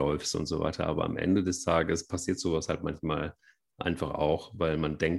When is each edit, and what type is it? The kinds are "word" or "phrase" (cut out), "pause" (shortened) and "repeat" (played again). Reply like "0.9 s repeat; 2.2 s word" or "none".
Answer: none